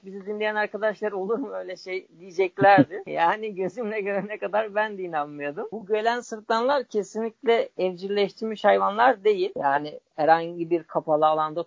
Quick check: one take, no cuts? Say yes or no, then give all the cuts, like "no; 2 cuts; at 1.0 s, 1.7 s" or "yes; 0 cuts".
yes; 0 cuts